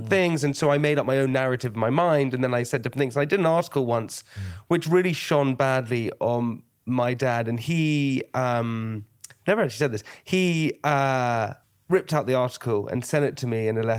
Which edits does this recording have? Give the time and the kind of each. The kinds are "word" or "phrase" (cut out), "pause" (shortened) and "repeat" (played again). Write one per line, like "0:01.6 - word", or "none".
0:11.6 - pause